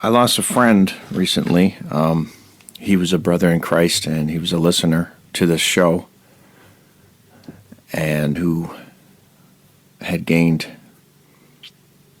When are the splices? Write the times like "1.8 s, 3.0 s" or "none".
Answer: 8.4 s